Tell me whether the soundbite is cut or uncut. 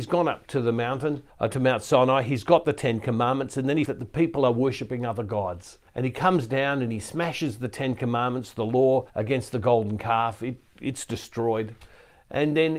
cut